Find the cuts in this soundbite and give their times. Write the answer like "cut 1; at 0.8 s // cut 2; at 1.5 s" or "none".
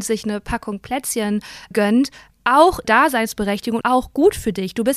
cut 1; at 1.7 s // cut 2; at 2.8 s // cut 3; at 3.8 s